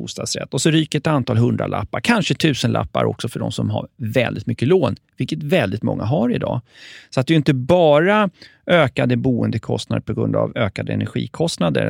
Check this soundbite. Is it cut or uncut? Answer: uncut